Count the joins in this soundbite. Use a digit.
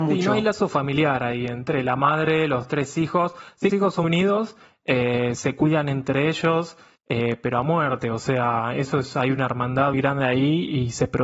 4